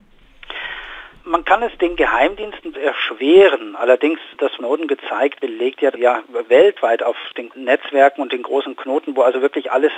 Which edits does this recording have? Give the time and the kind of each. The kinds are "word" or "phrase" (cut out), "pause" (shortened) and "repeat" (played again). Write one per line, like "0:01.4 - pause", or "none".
0:02.7 - word
0:04.6 - word
0:05.3 - word
0:05.9 - word
0:07.5 - word